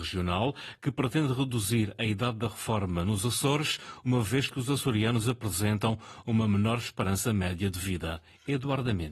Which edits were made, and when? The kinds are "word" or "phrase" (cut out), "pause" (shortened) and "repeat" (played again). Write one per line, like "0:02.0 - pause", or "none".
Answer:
none